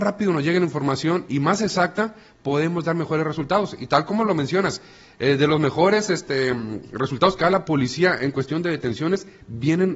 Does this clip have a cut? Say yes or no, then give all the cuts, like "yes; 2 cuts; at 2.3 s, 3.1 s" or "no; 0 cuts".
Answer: no; 0 cuts